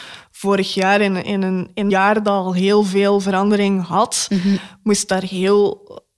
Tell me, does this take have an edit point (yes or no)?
yes